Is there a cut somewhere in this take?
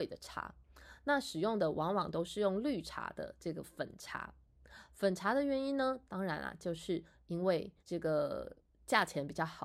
yes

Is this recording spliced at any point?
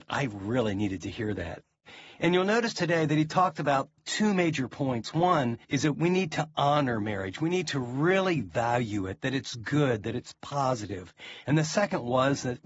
yes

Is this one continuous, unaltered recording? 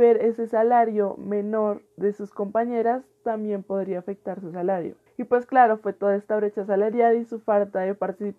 no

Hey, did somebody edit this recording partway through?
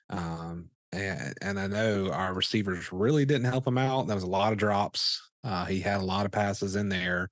no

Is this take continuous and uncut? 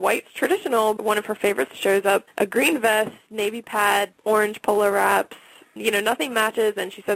no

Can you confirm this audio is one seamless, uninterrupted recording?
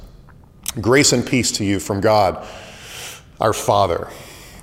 yes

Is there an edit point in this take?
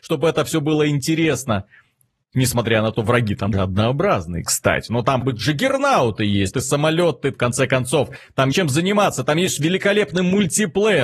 yes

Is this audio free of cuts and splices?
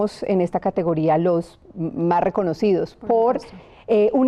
yes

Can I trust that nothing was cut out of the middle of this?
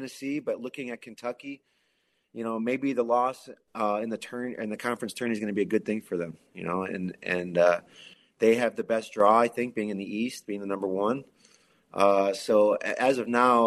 yes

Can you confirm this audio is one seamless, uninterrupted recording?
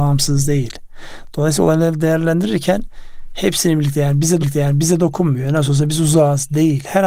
no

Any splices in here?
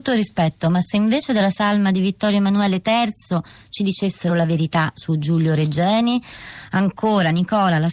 no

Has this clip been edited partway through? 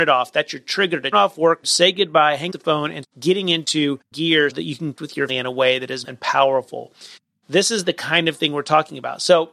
yes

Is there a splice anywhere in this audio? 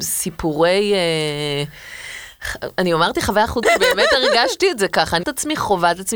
yes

